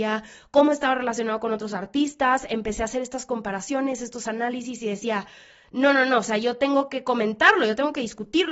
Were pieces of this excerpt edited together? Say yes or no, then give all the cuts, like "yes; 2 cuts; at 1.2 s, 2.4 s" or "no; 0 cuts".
no; 0 cuts